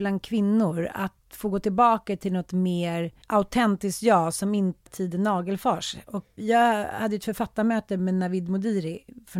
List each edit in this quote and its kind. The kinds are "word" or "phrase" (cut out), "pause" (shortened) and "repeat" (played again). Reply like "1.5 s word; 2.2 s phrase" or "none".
1.2 s pause; 3.2 s pause; 4.9 s word; 6.4 s word